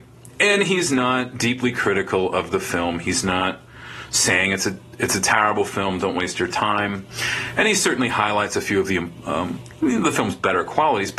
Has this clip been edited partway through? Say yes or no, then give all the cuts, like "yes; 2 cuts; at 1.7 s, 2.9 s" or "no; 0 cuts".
no; 0 cuts